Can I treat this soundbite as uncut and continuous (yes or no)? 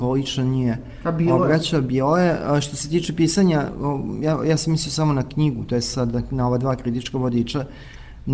yes